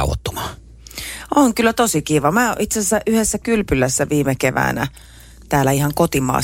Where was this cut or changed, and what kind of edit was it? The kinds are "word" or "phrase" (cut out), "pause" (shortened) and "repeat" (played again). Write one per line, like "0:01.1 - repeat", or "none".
none